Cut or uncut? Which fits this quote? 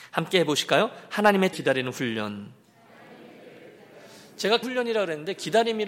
cut